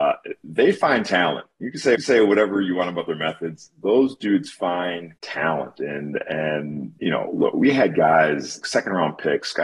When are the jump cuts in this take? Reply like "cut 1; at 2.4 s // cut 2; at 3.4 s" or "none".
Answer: cut 1; at 1.9 s // cut 2; at 5.2 s // cut 3; at 7.0 s // cut 4; at 8.6 s